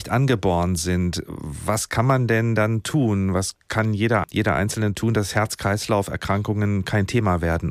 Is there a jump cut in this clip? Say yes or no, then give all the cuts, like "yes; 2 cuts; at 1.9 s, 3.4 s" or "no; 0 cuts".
yes; 2 cuts; at 3.6 s, 4.2 s